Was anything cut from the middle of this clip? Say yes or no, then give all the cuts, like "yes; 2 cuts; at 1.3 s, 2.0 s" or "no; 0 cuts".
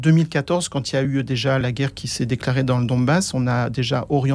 no; 0 cuts